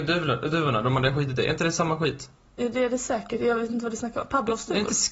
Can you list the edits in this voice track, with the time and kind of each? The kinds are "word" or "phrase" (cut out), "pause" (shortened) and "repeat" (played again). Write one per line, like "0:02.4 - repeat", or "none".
0:02.4 - pause